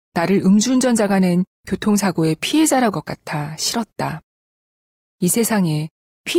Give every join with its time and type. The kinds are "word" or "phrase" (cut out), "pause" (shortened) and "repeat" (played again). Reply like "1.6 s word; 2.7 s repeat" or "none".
2.9 s word